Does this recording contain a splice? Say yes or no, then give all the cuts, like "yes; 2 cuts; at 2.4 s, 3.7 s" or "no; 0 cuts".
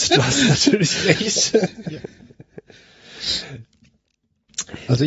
no; 0 cuts